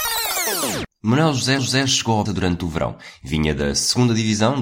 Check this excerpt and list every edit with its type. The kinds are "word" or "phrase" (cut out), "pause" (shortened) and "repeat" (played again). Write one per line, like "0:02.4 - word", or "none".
0:01.6 - repeat
0:02.3 - word